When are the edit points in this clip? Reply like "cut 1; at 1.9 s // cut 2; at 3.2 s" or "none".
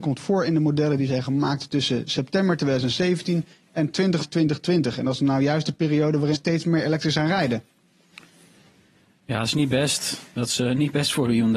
cut 1; at 4.2 s // cut 2; at 6.3 s // cut 3; at 7.1 s